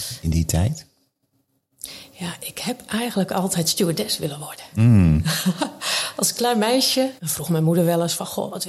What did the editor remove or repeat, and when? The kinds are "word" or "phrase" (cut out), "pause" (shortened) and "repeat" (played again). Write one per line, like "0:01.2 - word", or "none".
0:07.2 - pause